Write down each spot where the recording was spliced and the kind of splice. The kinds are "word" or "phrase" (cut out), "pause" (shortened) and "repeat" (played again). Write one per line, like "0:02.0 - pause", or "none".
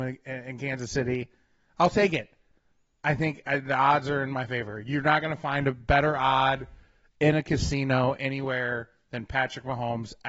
none

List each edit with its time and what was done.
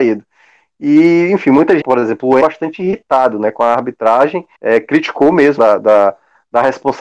0:01.8 - phrase
0:02.4 - phrase
0:04.5 - pause
0:05.6 - phrase

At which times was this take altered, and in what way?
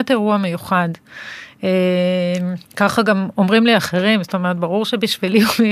0:02.7 - pause

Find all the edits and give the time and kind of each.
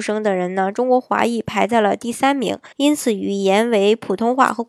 0:02.7 - pause

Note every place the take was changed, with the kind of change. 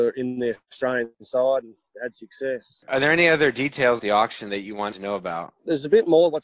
0:01.9 - word
0:04.0 - word
0:04.9 - word

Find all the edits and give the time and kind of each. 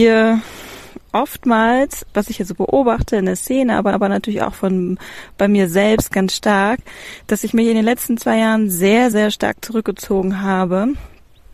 0:03.9 - repeat
0:09.1 - word

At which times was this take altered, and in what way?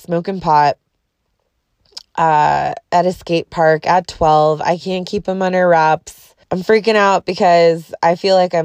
0:06.4 - pause

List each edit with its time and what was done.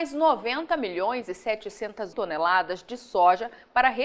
0:02.1 - word

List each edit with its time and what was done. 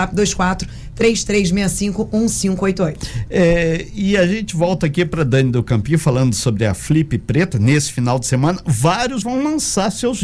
0:09.2 - word

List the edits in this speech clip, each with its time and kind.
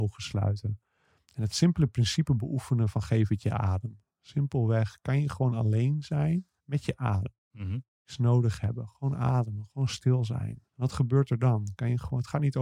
0:06.6 - pause
0:07.4 - pause
0:07.9 - pause
0:10.7 - pause

